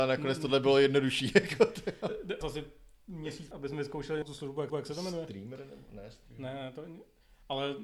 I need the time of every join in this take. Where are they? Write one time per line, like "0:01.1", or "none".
0:02.4
0:03.5
0:04.2
0:04.7